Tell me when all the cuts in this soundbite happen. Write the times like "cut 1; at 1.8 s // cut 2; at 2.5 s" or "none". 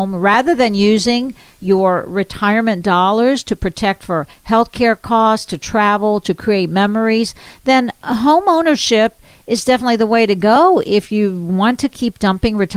none